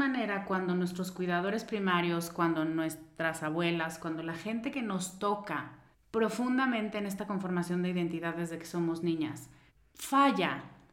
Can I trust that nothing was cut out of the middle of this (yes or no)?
no